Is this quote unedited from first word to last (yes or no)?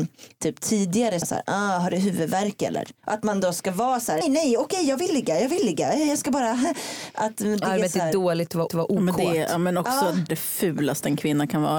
no